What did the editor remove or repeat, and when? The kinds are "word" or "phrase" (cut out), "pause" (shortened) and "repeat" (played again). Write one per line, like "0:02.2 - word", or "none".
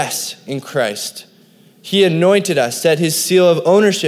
none